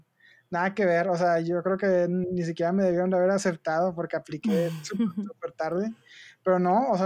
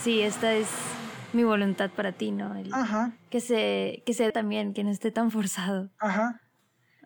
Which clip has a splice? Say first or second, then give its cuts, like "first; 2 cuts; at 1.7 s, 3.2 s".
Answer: second; 1 cut; at 4.3 s